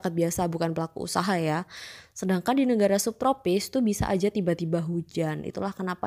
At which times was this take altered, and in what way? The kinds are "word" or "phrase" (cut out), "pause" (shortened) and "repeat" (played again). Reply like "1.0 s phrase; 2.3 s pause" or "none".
none